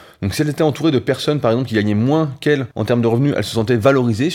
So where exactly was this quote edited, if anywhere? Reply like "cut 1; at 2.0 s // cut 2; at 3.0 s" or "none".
cut 1; at 2.7 s